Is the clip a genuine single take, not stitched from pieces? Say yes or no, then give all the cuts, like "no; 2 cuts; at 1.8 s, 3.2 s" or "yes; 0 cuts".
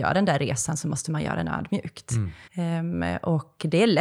no; 1 cut; at 2.5 s